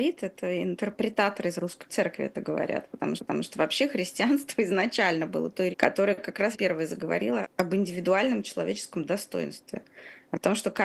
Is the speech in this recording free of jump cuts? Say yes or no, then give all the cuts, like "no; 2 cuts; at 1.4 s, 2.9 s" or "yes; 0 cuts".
no; 5 cuts; at 1.9 s, 3.2 s, 5.7 s, 6.5 s, 7.4 s